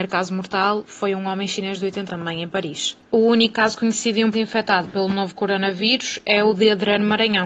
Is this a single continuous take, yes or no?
no